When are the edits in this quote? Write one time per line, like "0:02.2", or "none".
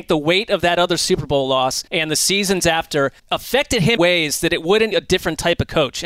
0:01.9
0:03.2
0:04.0
0:04.9